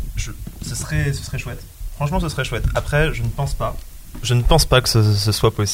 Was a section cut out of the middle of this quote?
no; 0 cuts

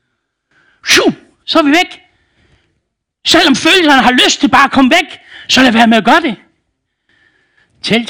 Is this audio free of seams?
yes; 0 cuts

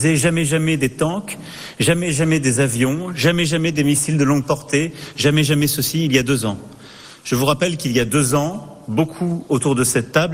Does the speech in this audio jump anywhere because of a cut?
no; 0 cuts

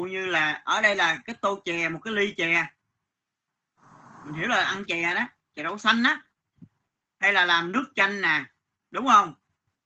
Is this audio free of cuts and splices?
yes; 0 cuts

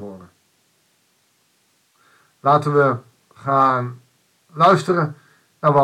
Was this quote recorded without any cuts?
yes; 0 cuts

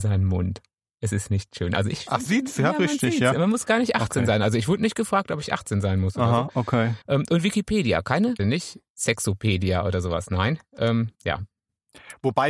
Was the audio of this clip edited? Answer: yes; 5 cuts; at 2.3 s, 7.0 s, 8.4 s, 8.9 s, 11.1 s

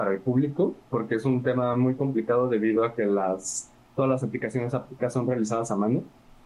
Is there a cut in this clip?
no; 0 cuts

